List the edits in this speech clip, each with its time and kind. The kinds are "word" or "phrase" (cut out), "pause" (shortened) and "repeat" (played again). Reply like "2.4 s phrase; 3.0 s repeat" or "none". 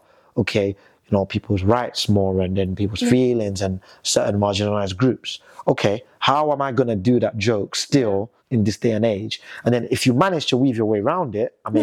8.4 s pause